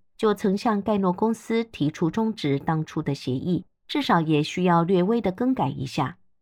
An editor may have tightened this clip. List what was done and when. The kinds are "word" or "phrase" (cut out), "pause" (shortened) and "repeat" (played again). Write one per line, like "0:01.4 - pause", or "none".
0:03.8 - pause